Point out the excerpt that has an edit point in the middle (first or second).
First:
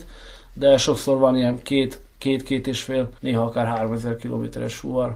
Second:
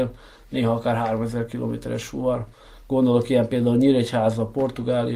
first